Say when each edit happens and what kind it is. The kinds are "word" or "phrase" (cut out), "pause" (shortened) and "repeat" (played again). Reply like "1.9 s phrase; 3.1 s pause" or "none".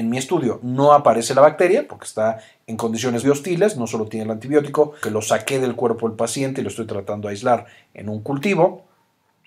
1.9 s word; 3.2 s word; 5.0 s word